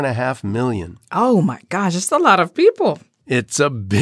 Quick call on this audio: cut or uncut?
uncut